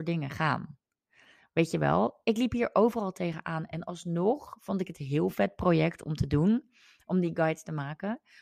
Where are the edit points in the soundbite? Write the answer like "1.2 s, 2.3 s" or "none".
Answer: none